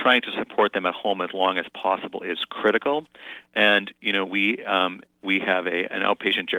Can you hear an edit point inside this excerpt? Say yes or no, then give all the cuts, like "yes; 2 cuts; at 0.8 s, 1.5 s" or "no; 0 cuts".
no; 0 cuts